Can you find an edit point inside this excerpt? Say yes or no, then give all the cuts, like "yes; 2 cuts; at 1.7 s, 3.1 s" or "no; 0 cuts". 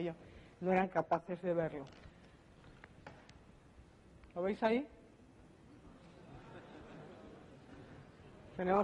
yes; 1 cut; at 4.3 s